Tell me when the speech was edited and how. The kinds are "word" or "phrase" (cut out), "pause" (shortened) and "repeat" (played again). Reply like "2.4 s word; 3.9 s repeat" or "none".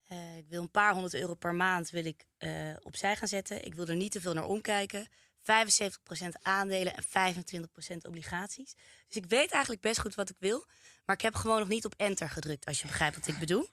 none